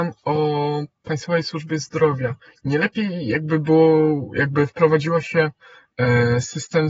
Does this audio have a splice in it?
no; 0 cuts

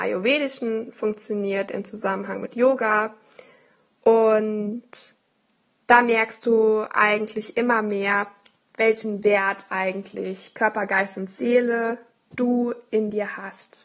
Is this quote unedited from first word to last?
yes; 0 cuts

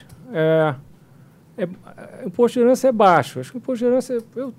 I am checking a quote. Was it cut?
no; 0 cuts

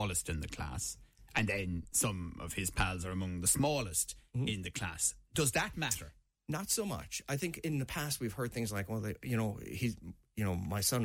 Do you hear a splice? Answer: no; 0 cuts

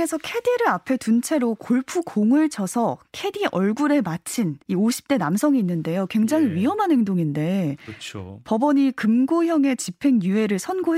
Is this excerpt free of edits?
no; 1 cut; at 4.6 s

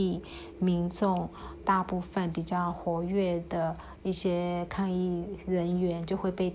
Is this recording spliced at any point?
yes; 1 cut; at 1.6 s

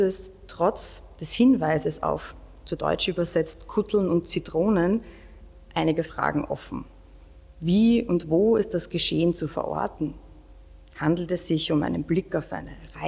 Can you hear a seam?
no; 0 cuts

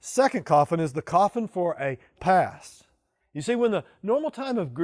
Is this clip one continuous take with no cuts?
no; 1 cut; at 2.2 s

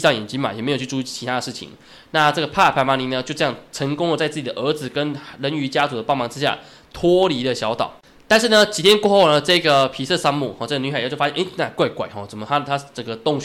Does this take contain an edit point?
no; 0 cuts

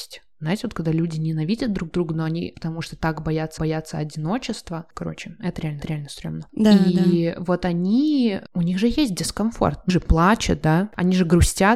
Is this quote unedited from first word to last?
no; 4 cuts; at 2.5 s, 3.6 s, 5.8 s, 9.9 s

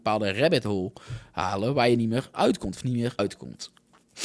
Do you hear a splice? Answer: yes; 1 cut; at 3.2 s

